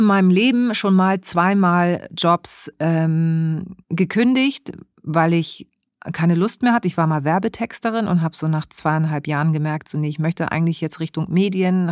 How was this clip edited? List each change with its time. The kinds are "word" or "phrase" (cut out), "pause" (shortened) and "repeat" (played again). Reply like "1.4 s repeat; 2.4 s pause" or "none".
3.8 s pause